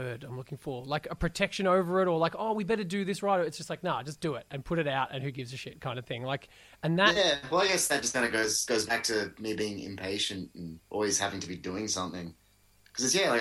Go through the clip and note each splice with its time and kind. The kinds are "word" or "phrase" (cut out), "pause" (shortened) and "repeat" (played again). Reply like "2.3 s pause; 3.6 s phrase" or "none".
10.8 s pause